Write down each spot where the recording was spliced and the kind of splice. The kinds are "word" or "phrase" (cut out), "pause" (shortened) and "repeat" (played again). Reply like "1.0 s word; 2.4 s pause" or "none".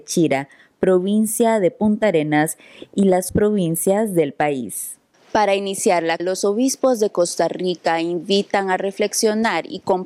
3.3 s word; 5.1 s pause; 6.2 s word

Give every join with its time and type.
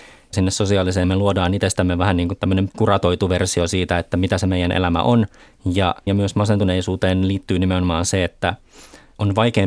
1.0 s word; 2.7 s word; 6.1 s word

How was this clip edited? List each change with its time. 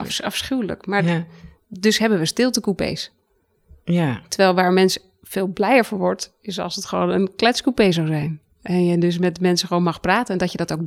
none

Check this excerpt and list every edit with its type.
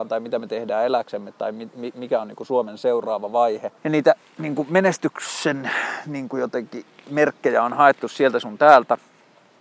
3.8 s pause

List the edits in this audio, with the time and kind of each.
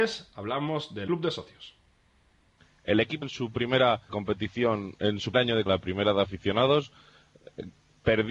1.1 s word; 3.2 s word; 4.1 s word; 5.3 s word; 5.7 s word

